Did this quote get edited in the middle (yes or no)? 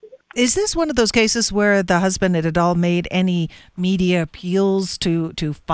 no